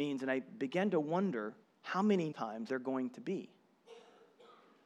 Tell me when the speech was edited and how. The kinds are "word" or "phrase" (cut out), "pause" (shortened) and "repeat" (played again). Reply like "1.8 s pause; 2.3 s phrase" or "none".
1.6 s pause; 2.3 s word; 2.7 s word